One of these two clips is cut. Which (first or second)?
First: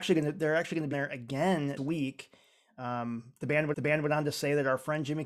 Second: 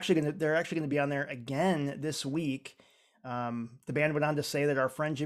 first